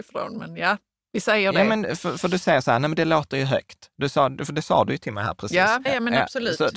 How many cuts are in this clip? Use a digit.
1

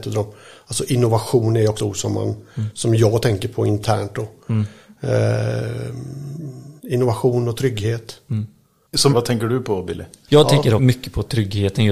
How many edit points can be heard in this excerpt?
4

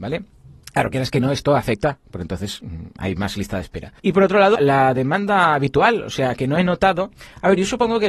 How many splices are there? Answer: 2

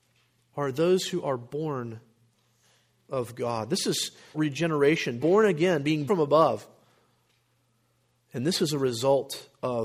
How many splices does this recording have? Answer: 3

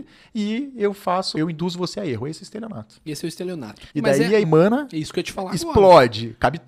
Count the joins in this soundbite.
3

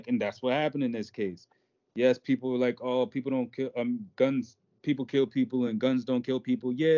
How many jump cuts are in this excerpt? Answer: 0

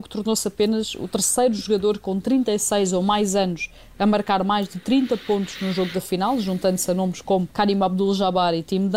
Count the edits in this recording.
1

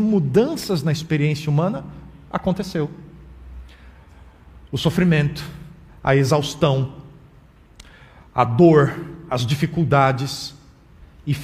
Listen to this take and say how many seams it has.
0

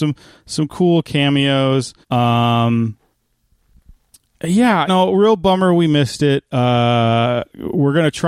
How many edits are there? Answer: 2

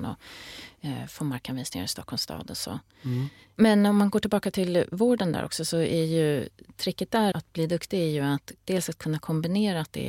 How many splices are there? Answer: 1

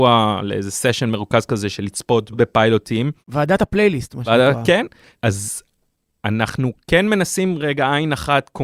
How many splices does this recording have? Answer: 0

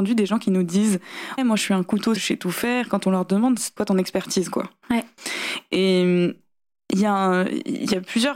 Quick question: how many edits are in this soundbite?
3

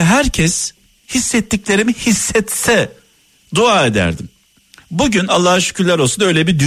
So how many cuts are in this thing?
2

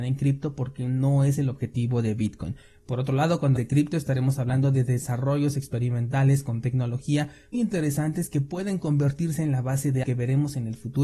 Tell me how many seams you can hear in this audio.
3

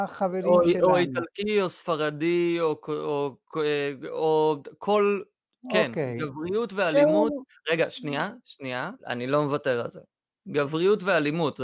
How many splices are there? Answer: 1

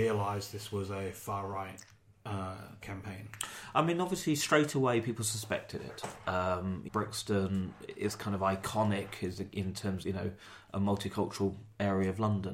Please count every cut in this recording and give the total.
3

